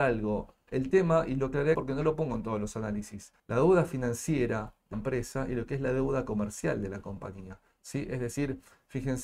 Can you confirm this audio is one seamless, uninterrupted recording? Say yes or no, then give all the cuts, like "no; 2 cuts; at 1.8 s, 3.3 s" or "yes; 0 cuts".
no; 3 cuts; at 1.7 s, 3.4 s, 4.9 s